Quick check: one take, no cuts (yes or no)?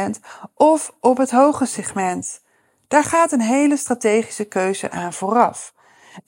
yes